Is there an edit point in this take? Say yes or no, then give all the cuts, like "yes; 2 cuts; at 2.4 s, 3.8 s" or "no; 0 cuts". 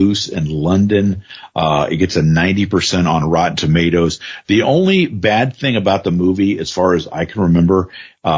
no; 0 cuts